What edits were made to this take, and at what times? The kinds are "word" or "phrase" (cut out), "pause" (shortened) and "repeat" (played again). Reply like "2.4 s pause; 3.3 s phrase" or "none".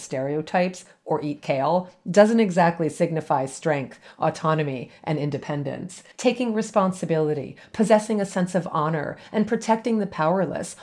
6.1 s pause